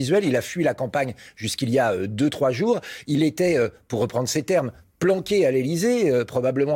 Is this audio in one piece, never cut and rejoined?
yes; 0 cuts

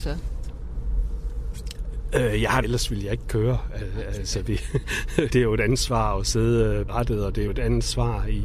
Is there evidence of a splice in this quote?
yes; 4 cuts; at 2.6 s, 5.3 s, 6.9 s, 7.5 s

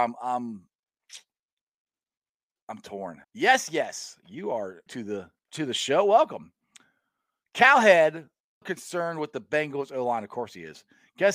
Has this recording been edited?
yes; 4 cuts; at 3.2 s, 4.9 s, 5.4 s, 8.6 s

